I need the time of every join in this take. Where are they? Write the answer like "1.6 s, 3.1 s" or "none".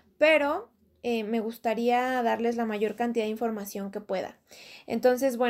none